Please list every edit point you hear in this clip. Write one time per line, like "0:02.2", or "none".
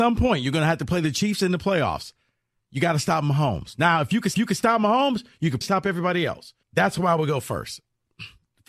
0:04.3
0:05.6
0:06.6